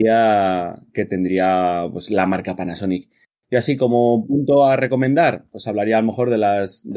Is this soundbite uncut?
yes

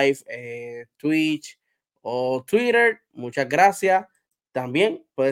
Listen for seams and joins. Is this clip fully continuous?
yes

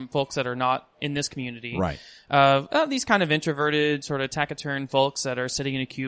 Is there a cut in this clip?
no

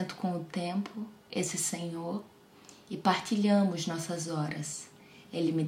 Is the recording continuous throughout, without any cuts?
yes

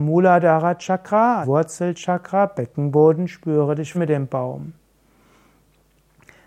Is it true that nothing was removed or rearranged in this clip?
no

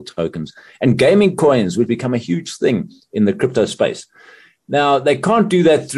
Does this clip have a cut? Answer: yes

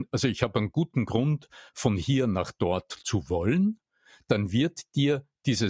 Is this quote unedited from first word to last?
yes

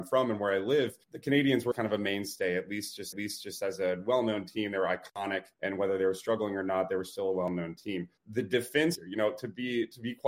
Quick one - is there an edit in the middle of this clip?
yes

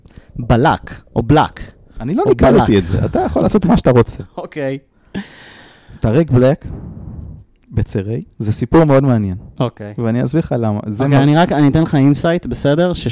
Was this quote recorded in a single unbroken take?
yes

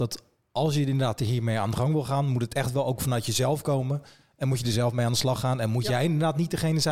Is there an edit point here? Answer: no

